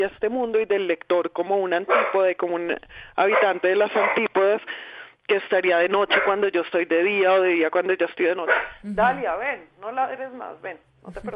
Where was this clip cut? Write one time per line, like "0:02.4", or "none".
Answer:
none